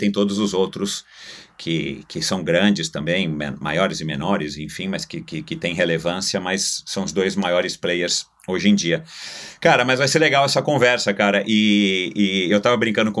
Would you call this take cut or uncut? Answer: uncut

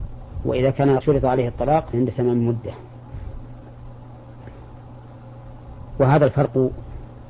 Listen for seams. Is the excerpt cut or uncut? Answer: cut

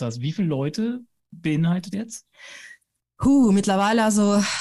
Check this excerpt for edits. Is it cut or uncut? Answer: cut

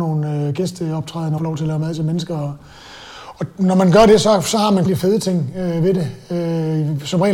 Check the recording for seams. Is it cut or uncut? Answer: cut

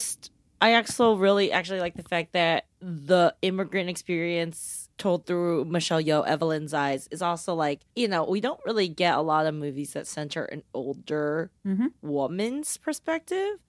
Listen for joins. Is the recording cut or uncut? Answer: cut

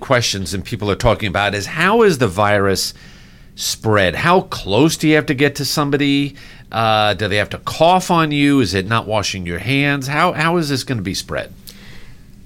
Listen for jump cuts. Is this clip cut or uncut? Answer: uncut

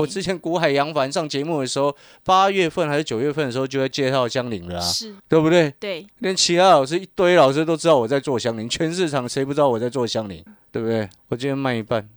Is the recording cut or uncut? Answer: cut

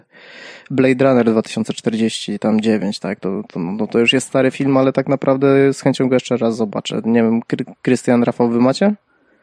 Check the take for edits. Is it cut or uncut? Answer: uncut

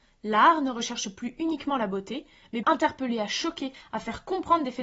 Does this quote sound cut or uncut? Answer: cut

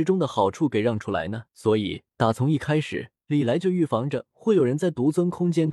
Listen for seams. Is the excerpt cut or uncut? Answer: cut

